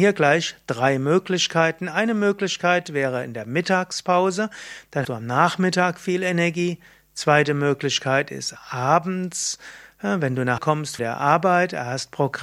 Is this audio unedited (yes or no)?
no